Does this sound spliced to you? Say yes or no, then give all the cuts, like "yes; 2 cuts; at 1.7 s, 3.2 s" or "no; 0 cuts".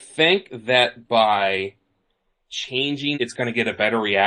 yes; 1 cut; at 3.1 s